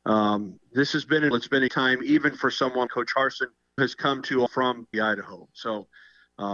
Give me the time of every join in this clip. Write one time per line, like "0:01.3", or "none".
0:01.3
0:01.7
0:02.9
0:03.8
0:04.5
0:04.9